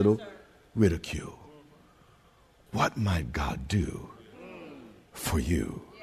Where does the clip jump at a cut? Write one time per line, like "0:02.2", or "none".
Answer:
none